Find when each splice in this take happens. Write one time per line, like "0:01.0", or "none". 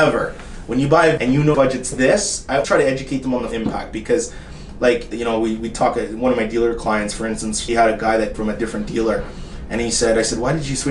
0:01.2
0:01.5
0:02.6
0:03.5
0:05.1
0:07.7
0:08.3

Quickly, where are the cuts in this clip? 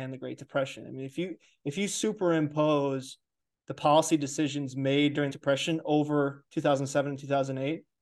0:05.3

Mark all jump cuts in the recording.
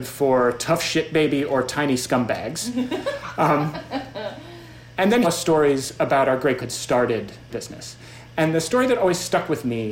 0:05.2
0:06.6
0:07.5

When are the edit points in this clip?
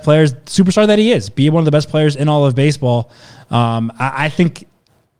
none

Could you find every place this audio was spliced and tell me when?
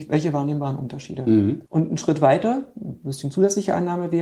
0:01.7

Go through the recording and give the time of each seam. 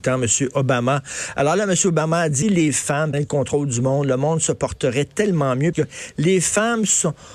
0:02.4
0:03.1
0:05.7

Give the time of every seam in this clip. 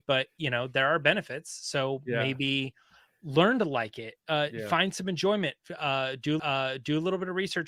0:06.4

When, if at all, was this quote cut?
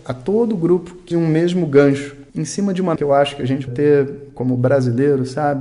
0:01.1
0:02.3
0:03.0
0:03.7

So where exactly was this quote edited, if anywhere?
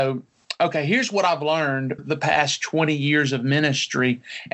0:02.0

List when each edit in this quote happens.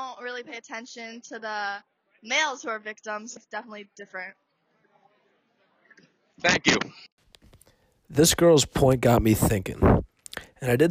0:03.4

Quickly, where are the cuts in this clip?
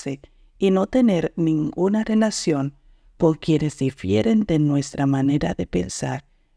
none

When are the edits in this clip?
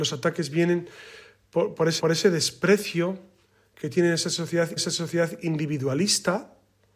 0:02.0
0:04.8

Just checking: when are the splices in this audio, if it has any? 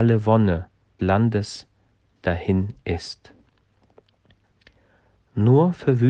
0:01.0

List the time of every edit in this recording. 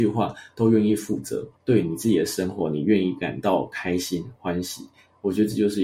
0:01.6

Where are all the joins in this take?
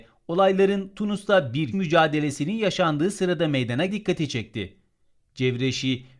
0:01.7
0:03.9

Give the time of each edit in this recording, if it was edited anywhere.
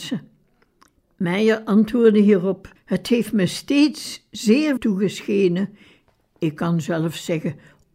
0:02.8
0:04.8

